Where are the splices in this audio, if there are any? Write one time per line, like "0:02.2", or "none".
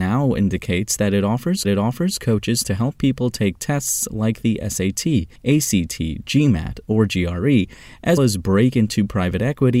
0:01.6
0:05.4
0:08.2

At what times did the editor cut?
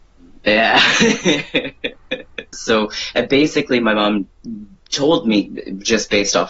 none

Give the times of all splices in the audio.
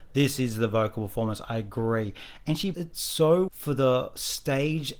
0:02.7
0:03.5

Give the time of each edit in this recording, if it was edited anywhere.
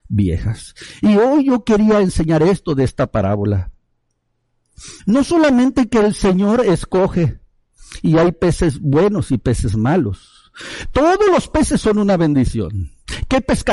0:05.0

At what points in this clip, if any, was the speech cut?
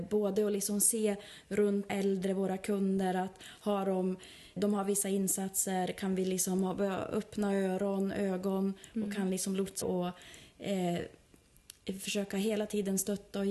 0:01.9
0:04.6
0:09.8

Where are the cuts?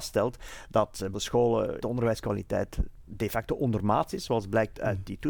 0:01.1
0:01.8

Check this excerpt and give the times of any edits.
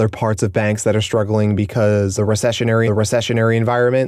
0:02.2
0:02.9

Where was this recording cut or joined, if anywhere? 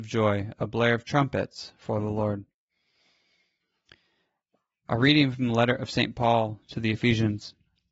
none

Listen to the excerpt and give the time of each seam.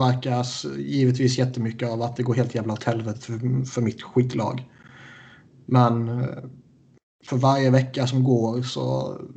none

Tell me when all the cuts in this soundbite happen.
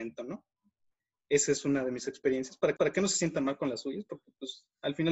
0:02.8

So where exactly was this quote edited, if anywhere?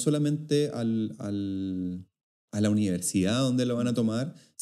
none

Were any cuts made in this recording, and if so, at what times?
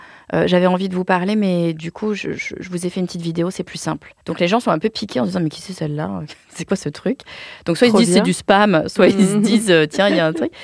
0:04.2

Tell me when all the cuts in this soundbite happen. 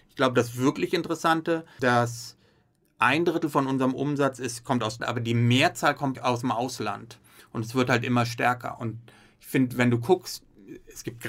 0:01.8
0:05.0
0:06.1

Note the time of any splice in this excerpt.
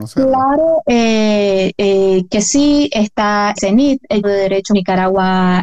0:02.3
0:03.6
0:04.2
0:04.7

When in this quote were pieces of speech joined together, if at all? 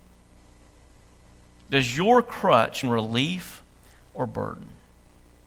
0:02.8

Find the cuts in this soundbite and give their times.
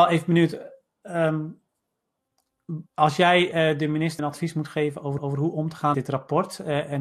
0:02.9
0:04.2
0:05.2
0:05.9

